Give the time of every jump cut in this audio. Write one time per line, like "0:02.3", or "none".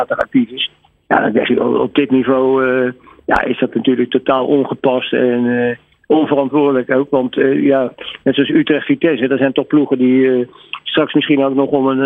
none

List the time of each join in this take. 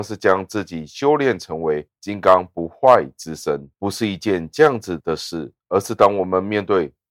0:03.7
0:05.6

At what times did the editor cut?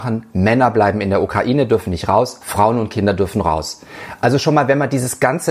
none

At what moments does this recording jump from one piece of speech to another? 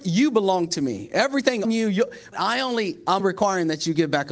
0:01.6
0:02.3
0:03.2

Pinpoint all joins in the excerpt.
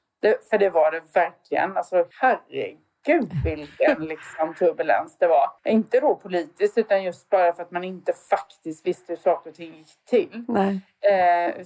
0:02.1
0:05.6

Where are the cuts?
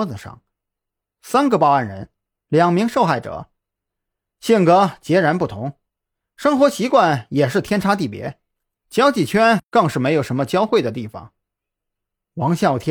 none

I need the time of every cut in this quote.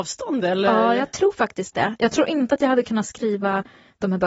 none

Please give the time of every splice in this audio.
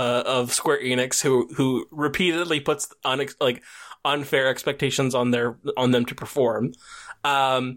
none

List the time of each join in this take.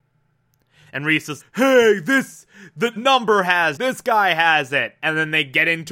0:01.4
0:03.0
0:03.8

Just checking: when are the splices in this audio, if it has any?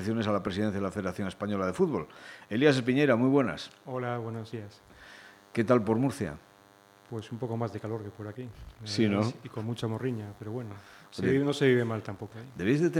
none

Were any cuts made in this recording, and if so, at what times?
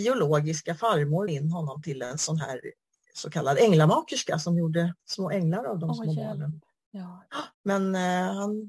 0:01.3
0:05.0
0:07.5

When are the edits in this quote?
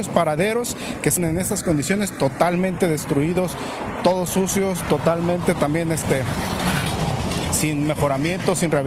0:01.2

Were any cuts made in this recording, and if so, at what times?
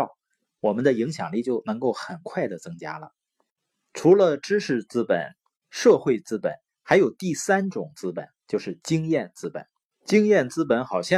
none

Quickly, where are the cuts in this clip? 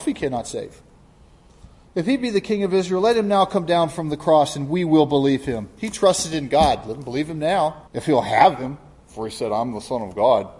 0:01.8
0:07.9

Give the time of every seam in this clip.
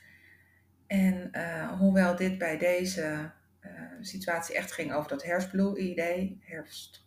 none

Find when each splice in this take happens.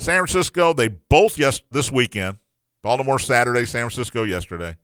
0:01.3
0:01.7

